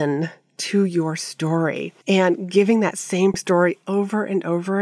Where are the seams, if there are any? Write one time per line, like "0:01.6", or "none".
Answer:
0:02.0